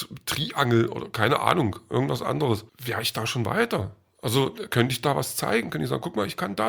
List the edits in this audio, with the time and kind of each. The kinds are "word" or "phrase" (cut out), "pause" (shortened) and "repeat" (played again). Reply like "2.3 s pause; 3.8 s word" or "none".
2.7 s pause